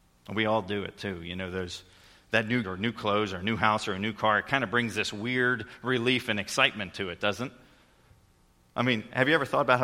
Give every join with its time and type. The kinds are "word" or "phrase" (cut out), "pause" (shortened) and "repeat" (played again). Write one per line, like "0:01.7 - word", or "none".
0:02.6 - word